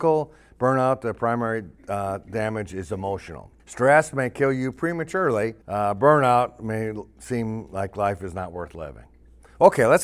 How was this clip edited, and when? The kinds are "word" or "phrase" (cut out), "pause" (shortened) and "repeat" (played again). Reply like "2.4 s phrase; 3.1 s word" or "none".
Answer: 3.6 s pause; 5.6 s pause